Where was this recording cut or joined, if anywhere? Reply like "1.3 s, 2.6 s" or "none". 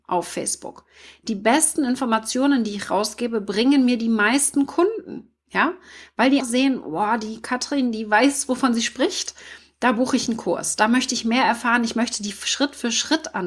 6.4 s

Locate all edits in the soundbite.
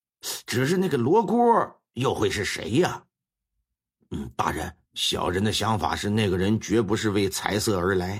4.9 s

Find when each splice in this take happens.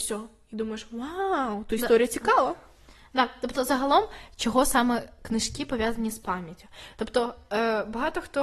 none

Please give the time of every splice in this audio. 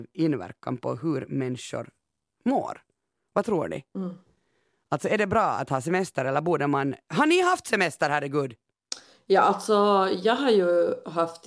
none

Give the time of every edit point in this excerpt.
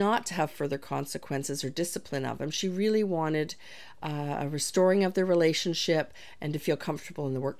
none

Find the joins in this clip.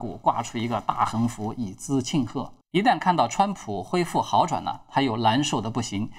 2.6 s

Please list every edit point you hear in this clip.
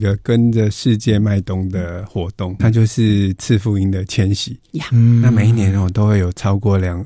2.6 s

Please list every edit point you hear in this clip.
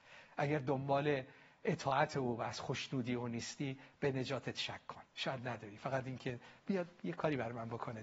5.1 s, 6.6 s

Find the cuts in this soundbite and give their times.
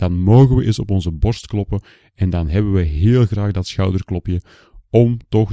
none

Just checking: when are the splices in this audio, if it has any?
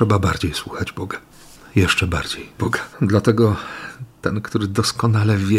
1.3 s, 2.6 s, 2.9 s

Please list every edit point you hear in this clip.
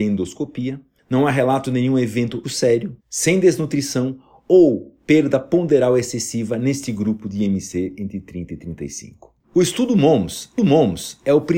2.4 s, 3.0 s, 9.4 s, 10.6 s

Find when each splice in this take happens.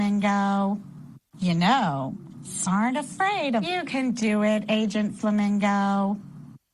2.7 s, 3.6 s

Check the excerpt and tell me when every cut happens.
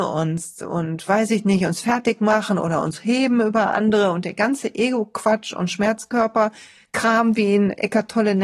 none

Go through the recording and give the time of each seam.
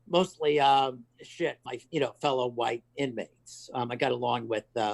1.7 s

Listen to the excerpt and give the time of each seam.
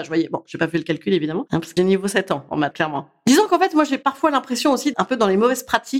1.8 s, 2.7 s, 4.9 s

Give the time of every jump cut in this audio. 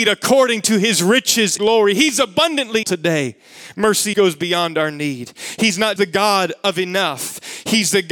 1.6 s, 2.8 s, 4.1 s, 6.0 s

